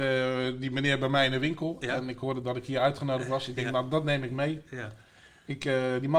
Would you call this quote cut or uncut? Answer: uncut